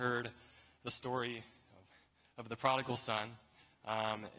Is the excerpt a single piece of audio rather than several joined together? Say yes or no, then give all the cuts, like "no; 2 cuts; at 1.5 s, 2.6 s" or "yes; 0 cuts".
yes; 0 cuts